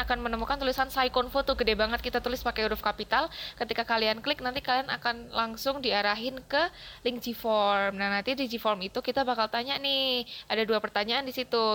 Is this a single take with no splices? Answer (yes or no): yes